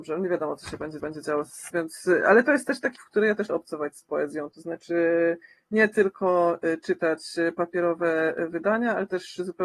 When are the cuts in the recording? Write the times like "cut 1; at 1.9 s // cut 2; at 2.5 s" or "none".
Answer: cut 1; at 1.0 s // cut 2; at 1.7 s // cut 3; at 3.0 s // cut 4; at 3.5 s

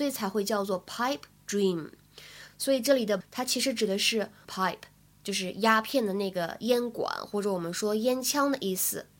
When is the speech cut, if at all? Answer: cut 1; at 3.2 s // cut 2; at 4.4 s

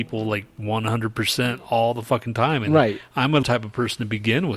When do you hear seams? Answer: cut 1; at 3.4 s

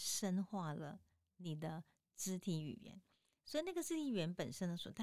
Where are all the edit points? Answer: none

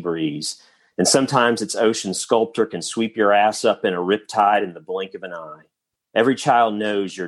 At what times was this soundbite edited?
cut 1; at 6.0 s

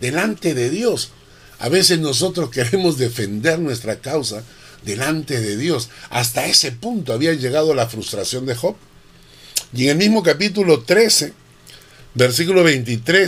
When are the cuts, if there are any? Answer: none

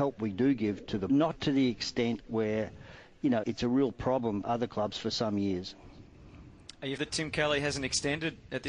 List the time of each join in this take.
cut 1; at 1.1 s // cut 2; at 3.4 s // cut 3; at 4.4 s // cut 4; at 7.0 s

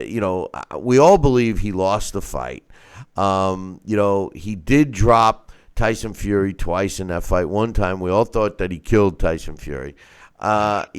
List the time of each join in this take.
none

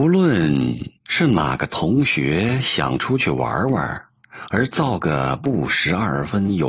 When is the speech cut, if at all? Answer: cut 1; at 1.0 s

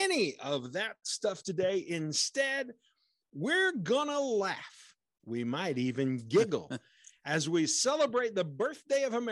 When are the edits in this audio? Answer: none

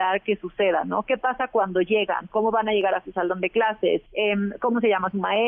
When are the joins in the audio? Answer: cut 1; at 4.1 s

